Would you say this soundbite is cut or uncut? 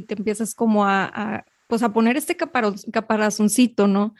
cut